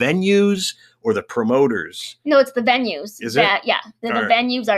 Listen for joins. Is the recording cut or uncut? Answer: uncut